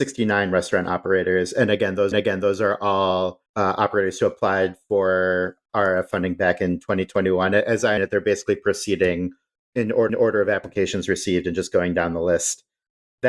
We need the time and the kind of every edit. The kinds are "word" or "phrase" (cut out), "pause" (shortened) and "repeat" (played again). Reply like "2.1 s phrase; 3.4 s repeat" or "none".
2.1 s repeat; 3.5 s pause; 8.0 s word; 10.1 s repeat